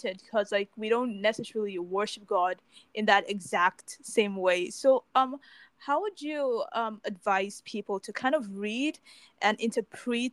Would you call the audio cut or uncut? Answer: uncut